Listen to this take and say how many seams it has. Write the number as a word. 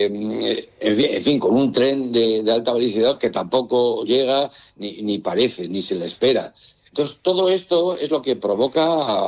zero